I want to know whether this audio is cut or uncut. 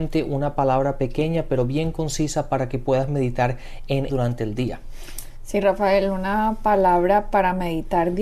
cut